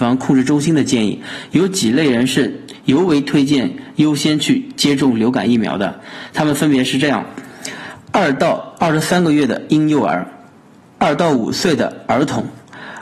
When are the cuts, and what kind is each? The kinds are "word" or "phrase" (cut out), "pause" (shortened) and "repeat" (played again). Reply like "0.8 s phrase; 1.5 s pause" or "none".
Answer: none